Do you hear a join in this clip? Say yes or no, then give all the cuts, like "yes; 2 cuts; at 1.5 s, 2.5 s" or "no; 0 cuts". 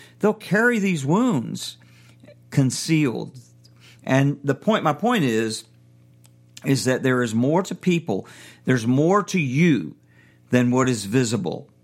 no; 0 cuts